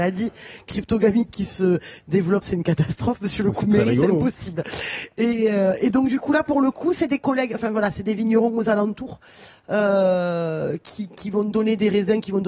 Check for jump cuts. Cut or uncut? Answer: uncut